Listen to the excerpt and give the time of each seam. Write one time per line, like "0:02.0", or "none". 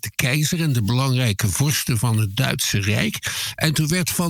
none